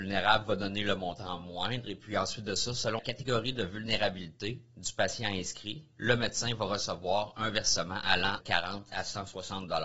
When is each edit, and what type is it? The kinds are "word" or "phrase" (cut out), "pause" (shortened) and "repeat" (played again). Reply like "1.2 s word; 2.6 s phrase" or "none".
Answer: 3.0 s word; 8.4 s word